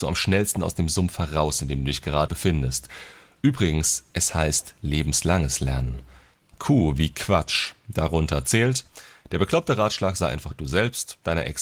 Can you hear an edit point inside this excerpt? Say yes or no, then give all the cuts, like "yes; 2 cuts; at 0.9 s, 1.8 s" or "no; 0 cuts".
yes; 1 cut; at 2.3 s